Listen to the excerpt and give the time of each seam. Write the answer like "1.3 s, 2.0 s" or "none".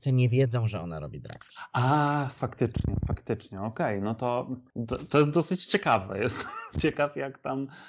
none